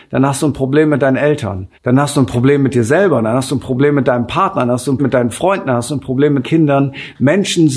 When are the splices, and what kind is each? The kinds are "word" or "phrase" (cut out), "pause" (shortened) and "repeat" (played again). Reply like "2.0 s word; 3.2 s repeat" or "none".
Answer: 1.7 s pause; 5.0 s word; 6.4 s word